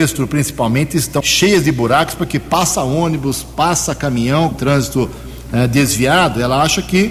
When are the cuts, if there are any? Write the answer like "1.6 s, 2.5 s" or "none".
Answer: 1.2 s, 4.5 s